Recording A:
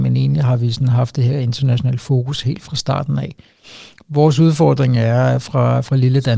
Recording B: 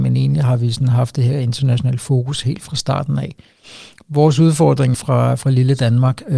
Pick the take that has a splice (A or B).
B